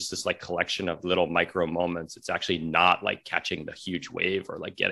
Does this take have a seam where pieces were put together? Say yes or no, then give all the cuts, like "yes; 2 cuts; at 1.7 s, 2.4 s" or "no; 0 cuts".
yes; 1 cut; at 1.0 s